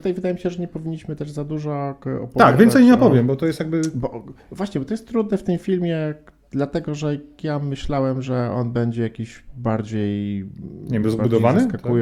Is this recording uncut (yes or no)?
yes